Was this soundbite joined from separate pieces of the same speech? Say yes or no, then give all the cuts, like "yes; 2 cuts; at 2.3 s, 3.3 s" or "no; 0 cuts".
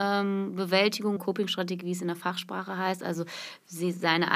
yes; 1 cut; at 1.2 s